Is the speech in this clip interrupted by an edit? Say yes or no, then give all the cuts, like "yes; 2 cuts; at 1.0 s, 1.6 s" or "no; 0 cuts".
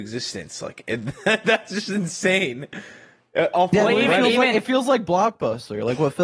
no; 0 cuts